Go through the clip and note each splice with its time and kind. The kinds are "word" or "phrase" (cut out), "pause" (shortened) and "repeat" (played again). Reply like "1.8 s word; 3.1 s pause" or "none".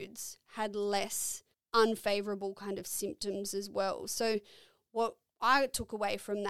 1.5 s pause